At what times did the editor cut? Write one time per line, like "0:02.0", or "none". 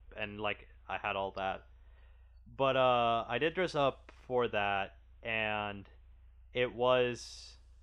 none